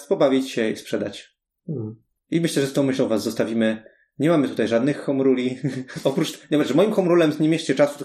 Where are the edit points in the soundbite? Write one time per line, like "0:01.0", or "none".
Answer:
none